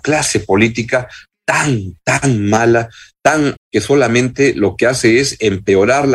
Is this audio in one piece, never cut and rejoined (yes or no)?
no